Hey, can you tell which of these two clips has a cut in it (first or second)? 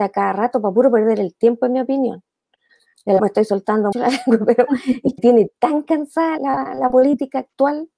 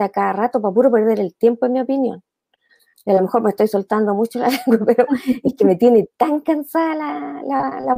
first